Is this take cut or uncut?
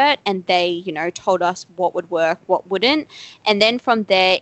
uncut